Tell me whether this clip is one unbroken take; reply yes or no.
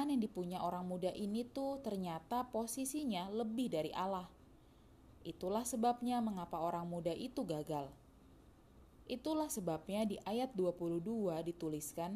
yes